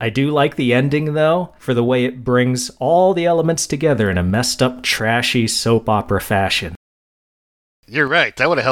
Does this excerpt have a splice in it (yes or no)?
no